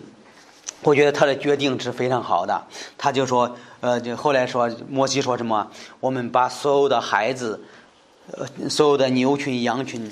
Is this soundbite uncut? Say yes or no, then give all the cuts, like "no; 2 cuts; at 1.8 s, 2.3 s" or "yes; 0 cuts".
yes; 0 cuts